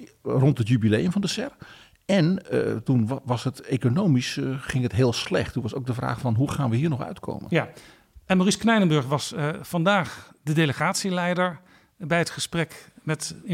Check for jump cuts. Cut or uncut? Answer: uncut